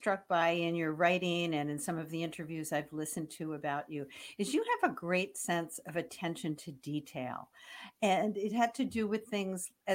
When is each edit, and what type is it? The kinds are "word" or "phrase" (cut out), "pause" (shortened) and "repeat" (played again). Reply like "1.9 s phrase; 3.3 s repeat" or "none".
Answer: none